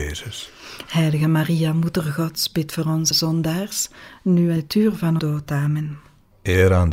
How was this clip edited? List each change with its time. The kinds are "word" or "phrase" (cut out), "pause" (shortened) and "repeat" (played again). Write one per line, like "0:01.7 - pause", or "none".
0:03.1 - word
0:04.6 - word
0:05.2 - word